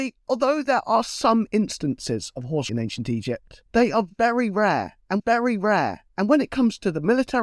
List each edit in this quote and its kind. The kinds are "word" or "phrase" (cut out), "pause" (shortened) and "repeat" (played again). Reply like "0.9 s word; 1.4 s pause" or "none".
2.7 s word; 3.7 s pause; 5.2 s repeat

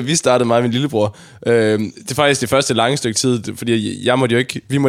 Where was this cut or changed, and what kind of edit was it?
none

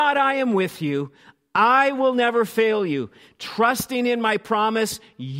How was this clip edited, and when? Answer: none

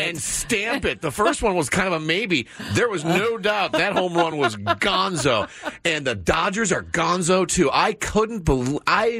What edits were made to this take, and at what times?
none

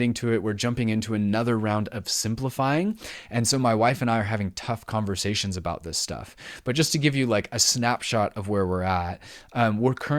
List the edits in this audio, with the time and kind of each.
none

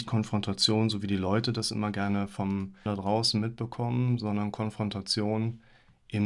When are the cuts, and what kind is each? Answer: 2.9 s word

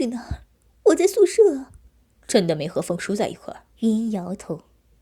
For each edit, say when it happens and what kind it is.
2.0 s pause; 3.7 s pause

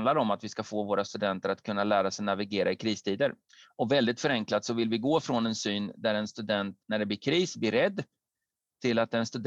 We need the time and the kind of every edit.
3.5 s pause; 6.8 s pause

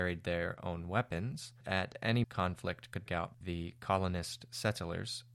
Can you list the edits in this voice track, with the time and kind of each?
1.6 s word; 2.2 s word; 3.1 s word; 3.4 s word

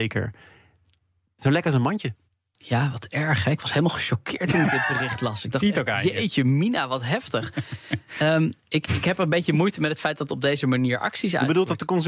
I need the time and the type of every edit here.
2.2 s pause; 10.3 s phrase

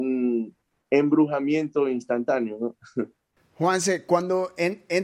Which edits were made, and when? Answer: none

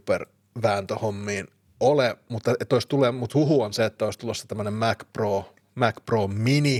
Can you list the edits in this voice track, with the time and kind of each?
none

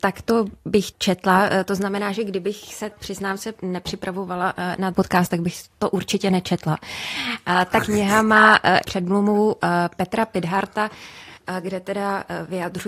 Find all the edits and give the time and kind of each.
0.9 s word; 2.9 s word; 4.9 s word; 8.8 s word; 11.4 s pause

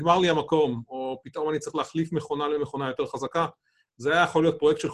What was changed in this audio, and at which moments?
none

